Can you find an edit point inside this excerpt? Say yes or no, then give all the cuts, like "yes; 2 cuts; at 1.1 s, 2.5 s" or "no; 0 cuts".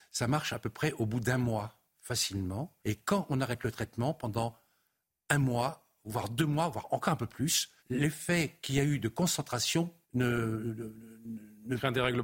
yes; 3 cuts; at 2.8 s, 7.8 s, 10.0 s